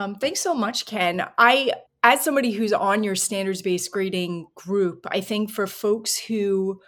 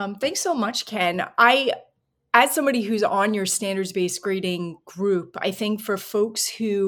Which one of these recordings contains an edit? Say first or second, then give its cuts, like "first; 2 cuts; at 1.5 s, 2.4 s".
first; 1 cut; at 1.9 s